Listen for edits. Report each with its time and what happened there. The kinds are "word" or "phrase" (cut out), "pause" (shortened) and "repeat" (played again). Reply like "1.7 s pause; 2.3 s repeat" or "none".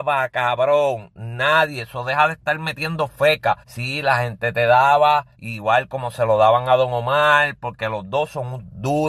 3.6 s pause; 5.3 s pause